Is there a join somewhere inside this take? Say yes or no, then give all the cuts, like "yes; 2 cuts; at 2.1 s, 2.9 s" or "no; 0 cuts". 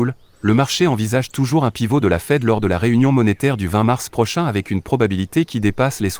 no; 0 cuts